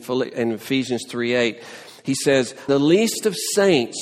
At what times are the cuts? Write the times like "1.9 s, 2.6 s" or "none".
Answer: 2.7 s